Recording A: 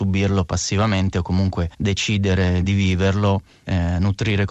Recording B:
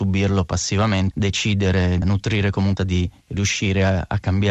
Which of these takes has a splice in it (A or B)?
B